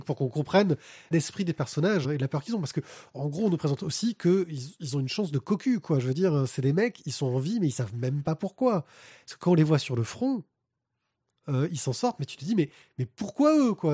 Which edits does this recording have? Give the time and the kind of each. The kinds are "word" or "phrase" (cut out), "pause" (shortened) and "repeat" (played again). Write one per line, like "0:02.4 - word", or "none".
0:01.1 - word
0:02.0 - word